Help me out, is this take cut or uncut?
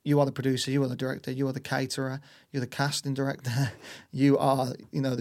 uncut